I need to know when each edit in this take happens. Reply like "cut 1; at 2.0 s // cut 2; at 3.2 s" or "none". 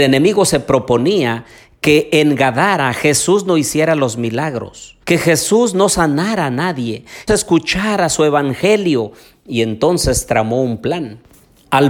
cut 1; at 5.0 s // cut 2; at 7.3 s